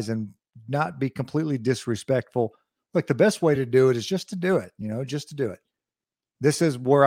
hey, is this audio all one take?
yes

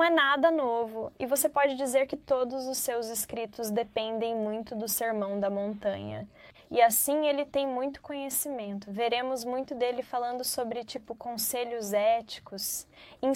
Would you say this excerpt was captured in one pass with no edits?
no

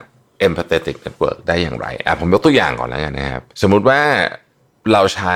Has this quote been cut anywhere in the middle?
yes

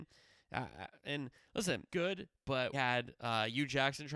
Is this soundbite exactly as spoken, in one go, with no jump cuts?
no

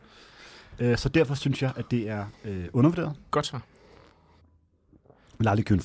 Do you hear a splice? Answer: no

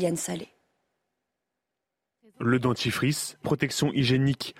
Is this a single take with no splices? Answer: no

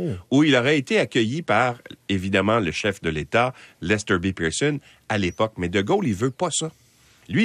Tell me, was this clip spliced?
no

